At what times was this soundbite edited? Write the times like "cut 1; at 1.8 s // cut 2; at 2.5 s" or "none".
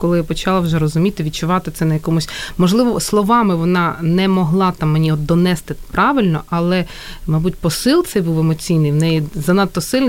none